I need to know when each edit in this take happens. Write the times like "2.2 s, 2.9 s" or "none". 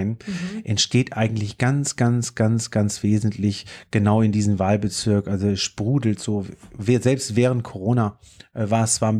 none